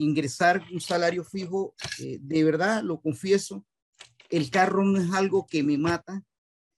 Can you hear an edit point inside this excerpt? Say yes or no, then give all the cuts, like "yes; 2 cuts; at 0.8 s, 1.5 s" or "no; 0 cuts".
no; 0 cuts